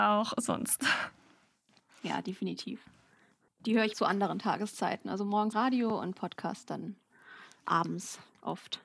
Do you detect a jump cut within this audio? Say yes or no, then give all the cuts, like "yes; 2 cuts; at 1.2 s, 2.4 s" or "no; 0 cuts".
yes; 2 cuts; at 3.9 s, 5.5 s